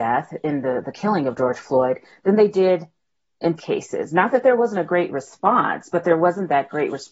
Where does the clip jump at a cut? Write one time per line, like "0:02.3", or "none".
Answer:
0:03.6